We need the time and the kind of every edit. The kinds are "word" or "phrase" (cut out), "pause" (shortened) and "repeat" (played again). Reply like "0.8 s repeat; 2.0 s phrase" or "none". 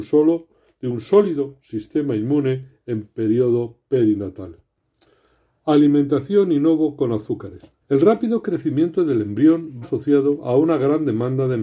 7.8 s pause; 9.8 s word